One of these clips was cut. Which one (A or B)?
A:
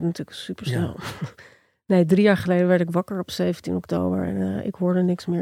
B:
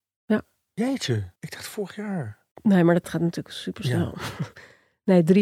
B